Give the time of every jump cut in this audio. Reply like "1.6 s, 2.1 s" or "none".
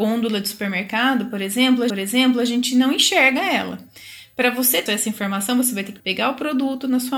1.9 s, 4.9 s, 6.0 s